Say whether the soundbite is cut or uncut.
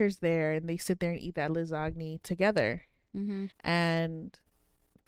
cut